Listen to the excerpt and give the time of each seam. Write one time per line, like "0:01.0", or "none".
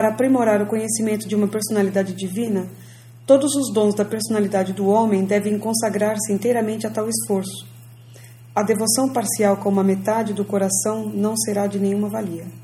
none